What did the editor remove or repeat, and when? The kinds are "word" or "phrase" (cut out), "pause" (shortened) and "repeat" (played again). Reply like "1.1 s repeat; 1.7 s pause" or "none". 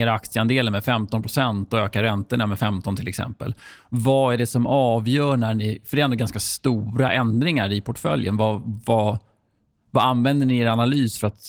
none